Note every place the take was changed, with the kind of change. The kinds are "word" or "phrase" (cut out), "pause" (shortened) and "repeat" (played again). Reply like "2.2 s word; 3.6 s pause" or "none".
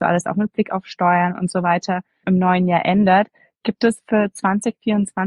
2.2 s word

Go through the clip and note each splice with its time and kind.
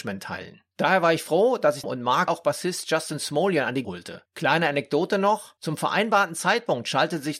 1.8 s phrase; 2.3 s word; 3.8 s word

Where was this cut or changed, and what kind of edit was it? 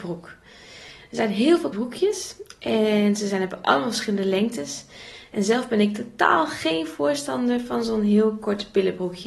1.7 s word

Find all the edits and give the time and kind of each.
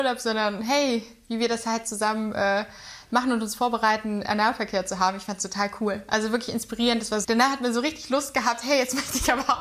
7.2 s word

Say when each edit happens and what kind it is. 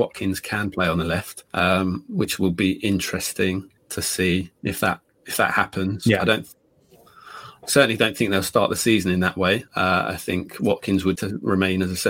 1.5 s pause; 3.8 s pause; 9.7 s pause; 11.2 s word

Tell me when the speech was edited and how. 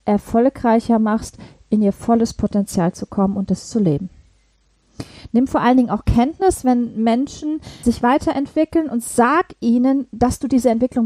7.8 s word

